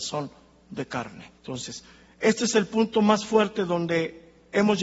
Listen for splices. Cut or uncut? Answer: cut